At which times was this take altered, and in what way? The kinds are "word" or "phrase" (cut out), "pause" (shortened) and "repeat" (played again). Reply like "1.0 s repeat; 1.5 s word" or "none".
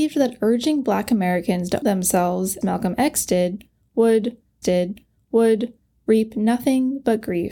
1.8 s word; 2.6 s word; 4.6 s repeat